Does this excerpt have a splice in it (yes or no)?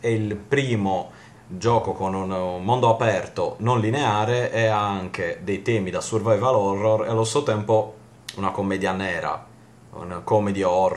no